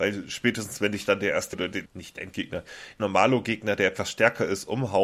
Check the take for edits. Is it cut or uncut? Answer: cut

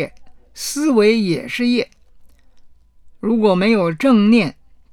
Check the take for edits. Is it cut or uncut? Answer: uncut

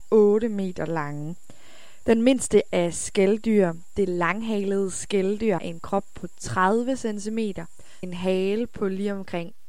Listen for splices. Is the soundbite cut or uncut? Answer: cut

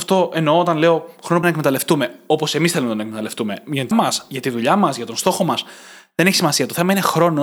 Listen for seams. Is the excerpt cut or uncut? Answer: cut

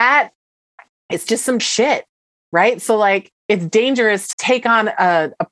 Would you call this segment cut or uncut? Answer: cut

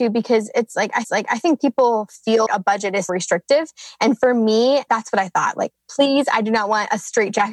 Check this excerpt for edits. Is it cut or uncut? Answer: cut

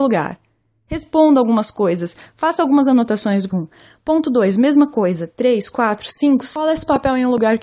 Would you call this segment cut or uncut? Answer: cut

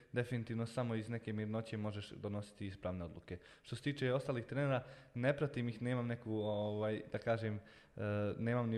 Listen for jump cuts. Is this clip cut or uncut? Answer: uncut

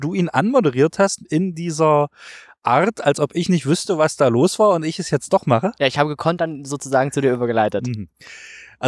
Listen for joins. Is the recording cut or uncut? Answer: uncut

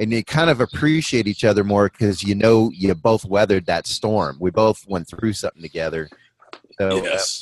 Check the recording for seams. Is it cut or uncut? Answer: uncut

